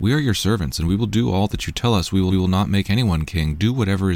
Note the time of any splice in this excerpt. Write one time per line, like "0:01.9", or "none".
0:02.3